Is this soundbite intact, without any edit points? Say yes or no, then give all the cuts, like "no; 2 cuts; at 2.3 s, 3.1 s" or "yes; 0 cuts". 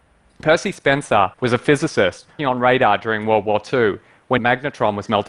no; 3 cuts; at 1.3 s, 2.4 s, 4.4 s